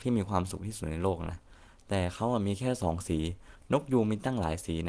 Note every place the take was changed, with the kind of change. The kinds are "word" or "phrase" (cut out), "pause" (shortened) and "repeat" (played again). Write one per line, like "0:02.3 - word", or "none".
none